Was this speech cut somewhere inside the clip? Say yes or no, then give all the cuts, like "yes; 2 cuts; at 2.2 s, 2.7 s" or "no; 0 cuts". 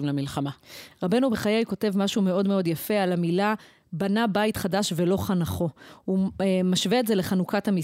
no; 0 cuts